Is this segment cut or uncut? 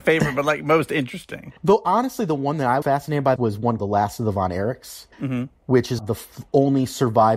cut